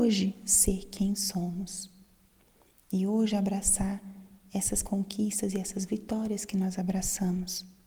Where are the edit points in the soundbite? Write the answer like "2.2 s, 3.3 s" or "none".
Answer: none

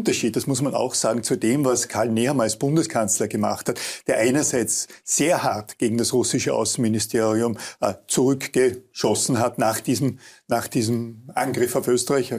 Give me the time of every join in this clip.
none

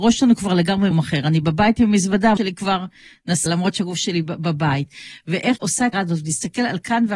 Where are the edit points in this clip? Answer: 0.9 s, 2.4 s, 3.5 s, 5.6 s, 5.9 s

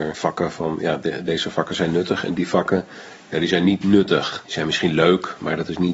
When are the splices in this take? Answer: none

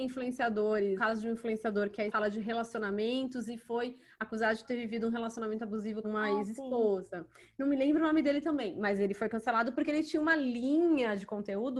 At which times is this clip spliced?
1.0 s, 2.1 s, 6.0 s

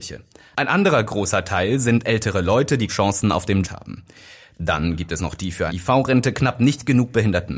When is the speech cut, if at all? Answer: 2.9 s, 3.6 s, 5.7 s

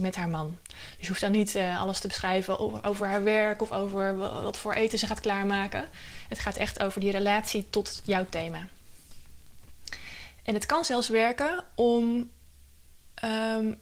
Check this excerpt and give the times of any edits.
none

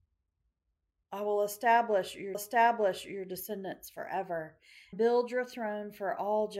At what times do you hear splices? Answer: 2.3 s, 4.9 s

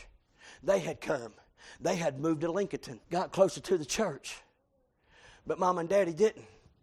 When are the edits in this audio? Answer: 3.0 s

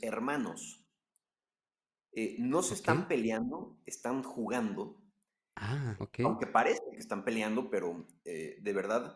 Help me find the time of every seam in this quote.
6.0 s, 7.0 s

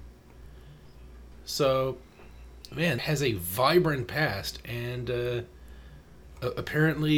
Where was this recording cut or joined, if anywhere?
3.0 s

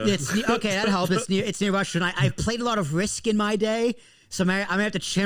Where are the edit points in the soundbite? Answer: none

